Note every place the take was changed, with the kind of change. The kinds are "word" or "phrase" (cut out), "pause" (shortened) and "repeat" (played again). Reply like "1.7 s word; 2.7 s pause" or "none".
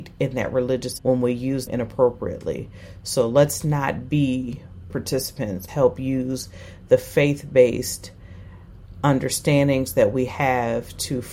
1.0 s word; 1.7 s word; 4.9 s word; 5.7 s phrase